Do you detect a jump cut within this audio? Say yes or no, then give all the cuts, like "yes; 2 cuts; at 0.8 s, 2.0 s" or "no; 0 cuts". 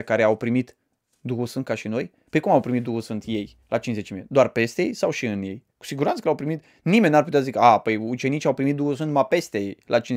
yes; 2 cuts; at 3.6 s, 5.7 s